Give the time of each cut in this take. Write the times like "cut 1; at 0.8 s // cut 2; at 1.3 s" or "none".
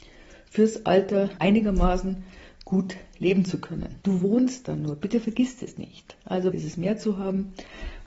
cut 1; at 1.4 s // cut 2; at 4.0 s // cut 3; at 6.5 s